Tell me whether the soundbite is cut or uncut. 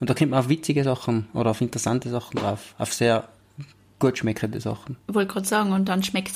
uncut